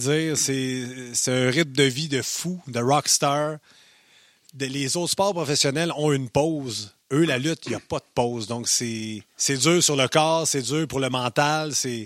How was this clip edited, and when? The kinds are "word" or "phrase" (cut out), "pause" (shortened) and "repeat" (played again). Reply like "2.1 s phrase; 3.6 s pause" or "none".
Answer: 7.0 s pause